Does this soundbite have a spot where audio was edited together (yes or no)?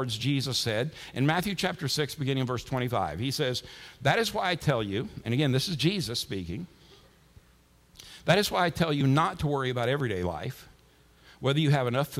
no